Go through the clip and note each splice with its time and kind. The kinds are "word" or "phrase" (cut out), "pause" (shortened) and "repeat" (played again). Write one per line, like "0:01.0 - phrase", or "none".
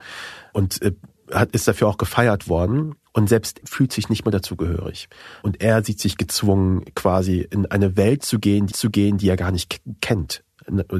0:03.6 - word
0:08.7 - repeat